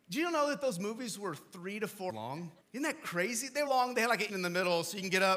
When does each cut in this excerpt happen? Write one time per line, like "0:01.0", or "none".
0:02.1
0:02.6
0:03.7
0:04.3